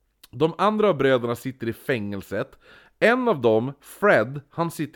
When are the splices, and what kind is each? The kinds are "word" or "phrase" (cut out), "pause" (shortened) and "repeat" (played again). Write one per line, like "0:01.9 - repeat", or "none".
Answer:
none

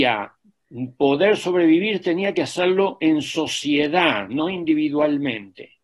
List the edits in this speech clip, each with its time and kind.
none

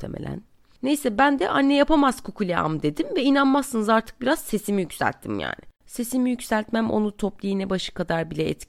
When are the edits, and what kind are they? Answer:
0:05.8 - pause

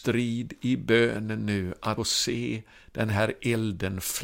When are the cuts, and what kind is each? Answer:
0:02.0 - word

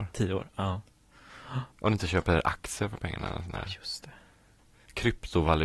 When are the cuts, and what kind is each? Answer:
0:01.7 - pause

